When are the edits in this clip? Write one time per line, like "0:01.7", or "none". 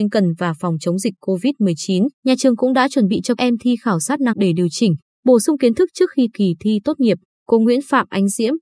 0:03.4
0:04.3
0:06.3